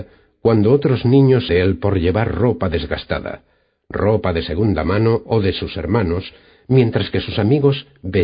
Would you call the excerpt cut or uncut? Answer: cut